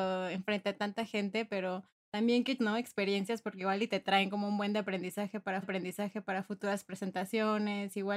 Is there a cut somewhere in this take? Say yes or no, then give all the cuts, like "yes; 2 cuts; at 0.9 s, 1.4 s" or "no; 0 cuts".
yes; 2 cuts; at 2.6 s, 5.6 s